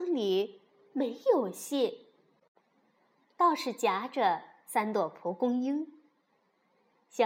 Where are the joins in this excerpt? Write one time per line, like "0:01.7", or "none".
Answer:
none